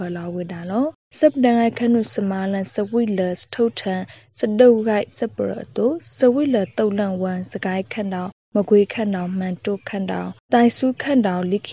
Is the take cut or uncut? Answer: uncut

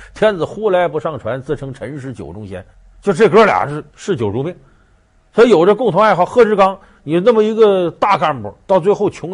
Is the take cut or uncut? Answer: cut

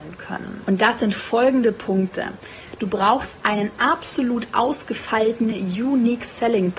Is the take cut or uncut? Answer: uncut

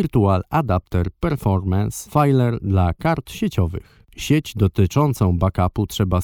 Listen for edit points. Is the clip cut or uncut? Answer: uncut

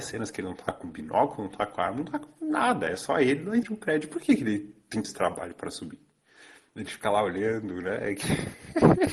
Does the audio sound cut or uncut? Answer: cut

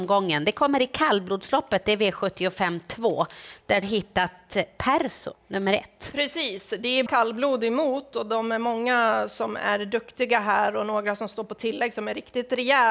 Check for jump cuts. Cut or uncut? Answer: cut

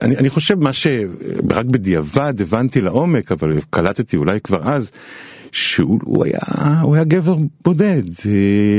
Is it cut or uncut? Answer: uncut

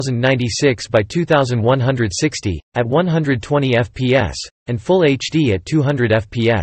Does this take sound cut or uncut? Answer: cut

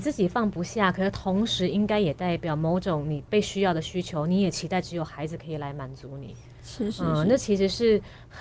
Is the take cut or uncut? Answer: uncut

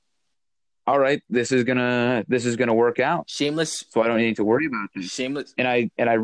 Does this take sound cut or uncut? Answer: uncut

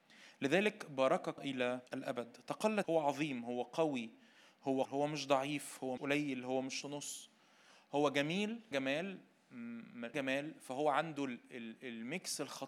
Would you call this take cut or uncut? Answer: cut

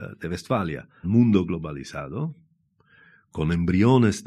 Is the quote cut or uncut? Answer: cut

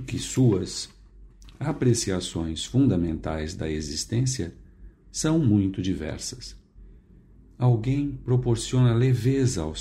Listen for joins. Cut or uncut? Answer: uncut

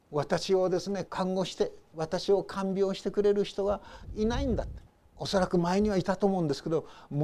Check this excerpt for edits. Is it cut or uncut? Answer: cut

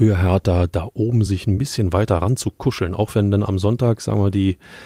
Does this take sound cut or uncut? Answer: uncut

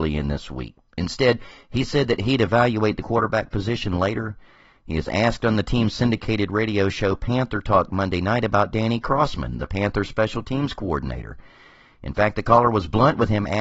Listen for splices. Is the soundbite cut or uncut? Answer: uncut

